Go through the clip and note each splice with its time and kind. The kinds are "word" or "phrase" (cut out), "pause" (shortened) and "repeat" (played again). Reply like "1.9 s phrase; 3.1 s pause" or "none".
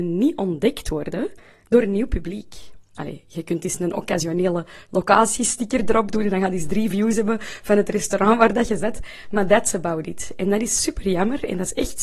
none